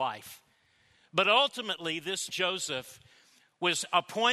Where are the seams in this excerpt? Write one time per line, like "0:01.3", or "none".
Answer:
0:02.3